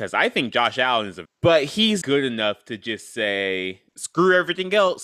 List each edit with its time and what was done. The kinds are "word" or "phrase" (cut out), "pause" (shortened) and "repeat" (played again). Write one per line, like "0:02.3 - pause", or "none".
0:01.2 - phrase
0:02.0 - word